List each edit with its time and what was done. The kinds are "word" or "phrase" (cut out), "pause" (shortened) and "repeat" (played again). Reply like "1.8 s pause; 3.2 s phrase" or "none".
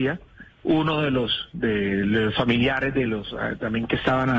none